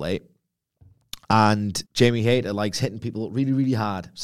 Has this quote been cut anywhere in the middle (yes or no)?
yes